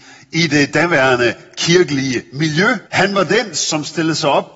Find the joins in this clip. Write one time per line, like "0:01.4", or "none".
0:02.9